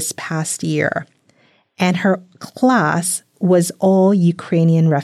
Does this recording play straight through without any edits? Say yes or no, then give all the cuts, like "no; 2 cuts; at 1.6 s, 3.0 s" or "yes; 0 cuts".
yes; 0 cuts